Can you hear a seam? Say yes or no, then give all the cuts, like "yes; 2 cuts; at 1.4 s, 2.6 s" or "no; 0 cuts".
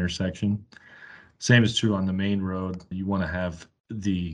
no; 0 cuts